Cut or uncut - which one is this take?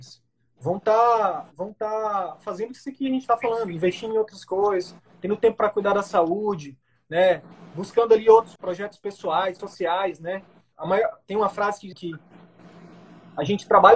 cut